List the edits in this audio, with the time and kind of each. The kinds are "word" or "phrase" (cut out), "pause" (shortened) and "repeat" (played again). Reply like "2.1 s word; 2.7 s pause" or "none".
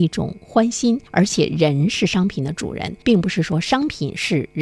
1.1 s pause; 3.0 s pause